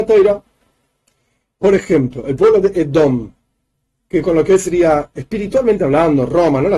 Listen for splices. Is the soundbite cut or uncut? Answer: cut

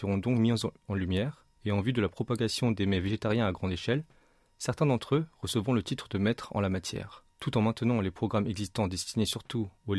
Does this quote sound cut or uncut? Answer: cut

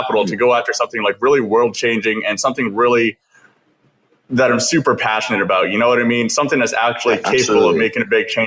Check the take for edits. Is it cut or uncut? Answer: uncut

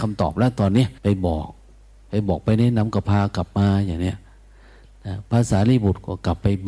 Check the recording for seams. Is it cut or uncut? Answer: cut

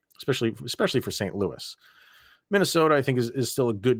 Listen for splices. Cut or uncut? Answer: uncut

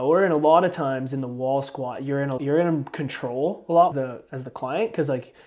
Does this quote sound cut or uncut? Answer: cut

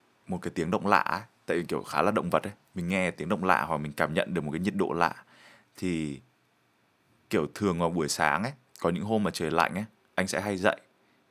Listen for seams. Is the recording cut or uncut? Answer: uncut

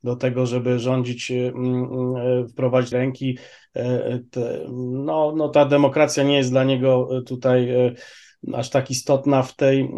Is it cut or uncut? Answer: cut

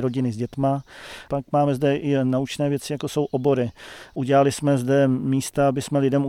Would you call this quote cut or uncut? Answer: uncut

